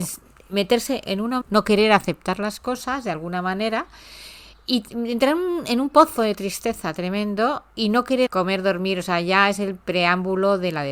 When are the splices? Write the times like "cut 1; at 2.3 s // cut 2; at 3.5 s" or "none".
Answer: cut 1; at 1.4 s // cut 2; at 8.3 s